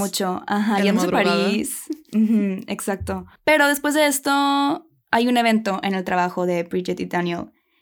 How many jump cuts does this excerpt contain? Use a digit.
0